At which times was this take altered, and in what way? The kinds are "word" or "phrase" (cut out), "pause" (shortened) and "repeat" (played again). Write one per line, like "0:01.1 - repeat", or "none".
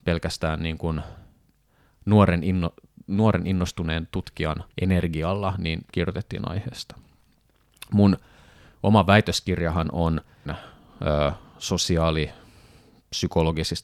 0:04.7 - pause
0:05.9 - phrase
0:10.5 - word